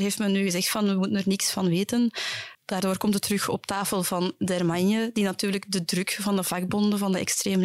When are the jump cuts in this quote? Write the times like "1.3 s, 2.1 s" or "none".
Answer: 2.5 s